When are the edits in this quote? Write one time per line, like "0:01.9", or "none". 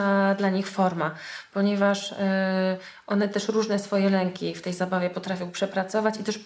none